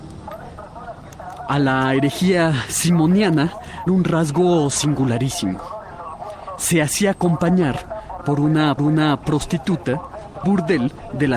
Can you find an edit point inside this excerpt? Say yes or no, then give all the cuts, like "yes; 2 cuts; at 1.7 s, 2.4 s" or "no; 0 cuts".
yes; 3 cuts; at 3.9 s, 8.8 s, 10.4 s